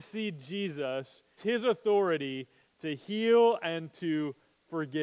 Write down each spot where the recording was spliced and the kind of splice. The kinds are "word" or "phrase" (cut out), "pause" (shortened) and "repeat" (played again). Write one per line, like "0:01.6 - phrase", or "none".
0:01.4 - word